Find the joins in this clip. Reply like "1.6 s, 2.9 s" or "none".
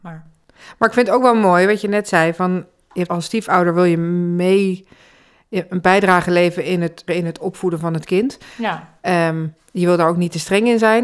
3.1 s, 7.1 s